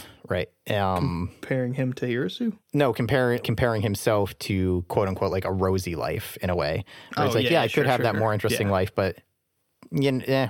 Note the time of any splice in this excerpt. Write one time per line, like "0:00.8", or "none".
0:02.7
0:03.4